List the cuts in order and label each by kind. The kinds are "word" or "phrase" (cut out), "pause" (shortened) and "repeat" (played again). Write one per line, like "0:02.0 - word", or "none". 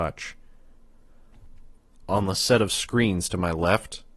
none